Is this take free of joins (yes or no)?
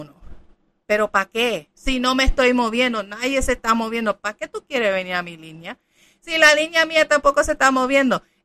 no